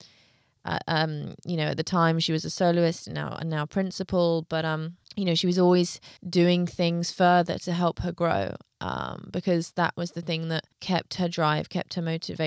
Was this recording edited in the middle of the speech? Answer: yes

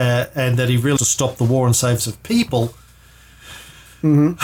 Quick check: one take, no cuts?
no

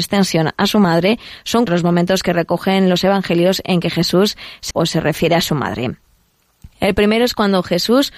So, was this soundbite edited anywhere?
yes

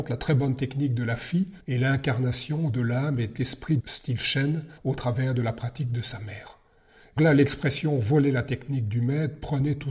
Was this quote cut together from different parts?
yes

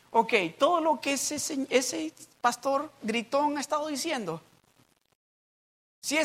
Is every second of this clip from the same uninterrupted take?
yes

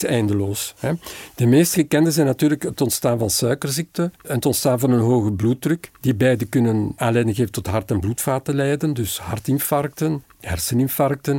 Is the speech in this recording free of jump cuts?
yes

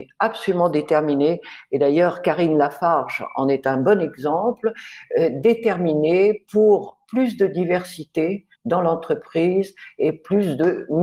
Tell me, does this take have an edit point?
yes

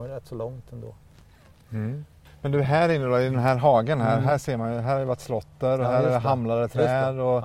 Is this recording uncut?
yes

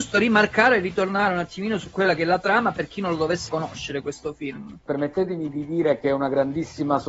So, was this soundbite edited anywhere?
yes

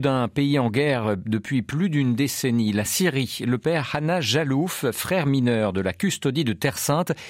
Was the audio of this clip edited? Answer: no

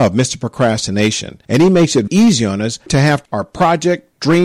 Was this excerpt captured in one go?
no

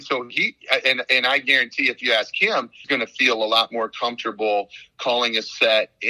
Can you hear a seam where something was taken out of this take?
yes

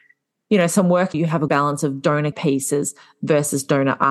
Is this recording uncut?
no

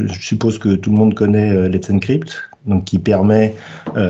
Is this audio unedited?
yes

